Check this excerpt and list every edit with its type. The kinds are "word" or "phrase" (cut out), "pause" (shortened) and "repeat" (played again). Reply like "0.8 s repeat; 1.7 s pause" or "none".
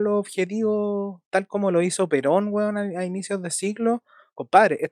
none